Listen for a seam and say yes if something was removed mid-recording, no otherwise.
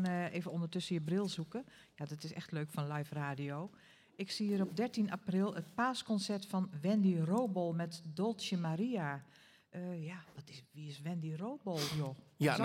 no